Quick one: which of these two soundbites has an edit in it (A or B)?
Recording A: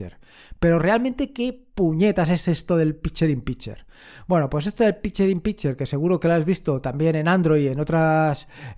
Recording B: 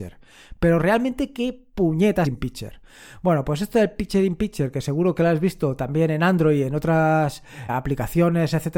B